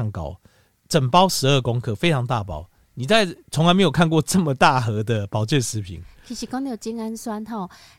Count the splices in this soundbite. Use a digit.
1